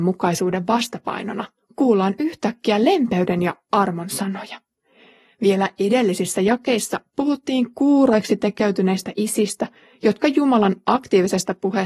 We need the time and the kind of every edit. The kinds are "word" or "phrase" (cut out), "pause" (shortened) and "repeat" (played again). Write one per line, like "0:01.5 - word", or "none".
none